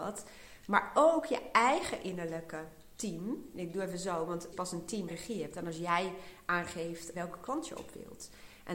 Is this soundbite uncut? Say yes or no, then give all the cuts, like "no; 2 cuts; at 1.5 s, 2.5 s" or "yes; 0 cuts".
no; 3 cuts; at 4.5 s, 5.1 s, 7.1 s